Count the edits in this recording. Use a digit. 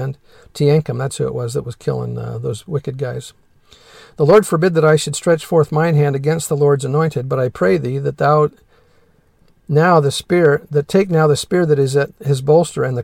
0